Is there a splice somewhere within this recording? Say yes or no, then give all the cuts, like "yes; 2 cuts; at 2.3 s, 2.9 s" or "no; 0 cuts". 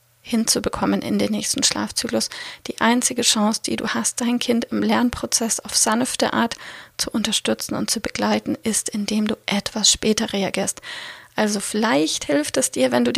no; 0 cuts